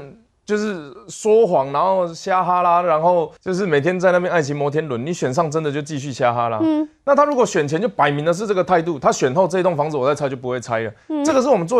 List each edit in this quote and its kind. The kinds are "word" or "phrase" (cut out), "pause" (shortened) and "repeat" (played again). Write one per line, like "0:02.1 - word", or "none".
0:03.4 - pause